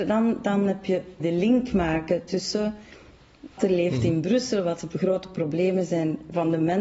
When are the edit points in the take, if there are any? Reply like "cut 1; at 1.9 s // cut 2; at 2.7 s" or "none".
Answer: cut 1; at 1.2 s // cut 2; at 3.6 s

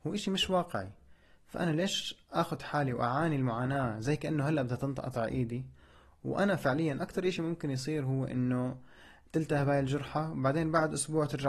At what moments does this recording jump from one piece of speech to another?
none

